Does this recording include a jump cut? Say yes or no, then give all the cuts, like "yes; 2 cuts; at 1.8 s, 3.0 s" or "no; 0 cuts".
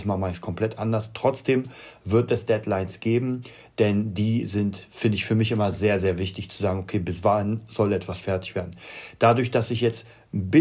no; 0 cuts